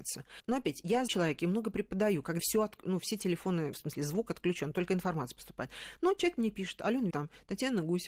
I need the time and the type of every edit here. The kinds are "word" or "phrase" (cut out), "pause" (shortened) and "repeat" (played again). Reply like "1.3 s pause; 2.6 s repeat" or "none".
1.1 s word; 2.4 s phrase; 3.7 s word; 7.1 s word